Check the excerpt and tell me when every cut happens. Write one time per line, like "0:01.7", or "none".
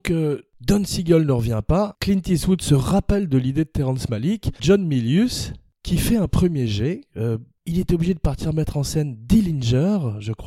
0:04.6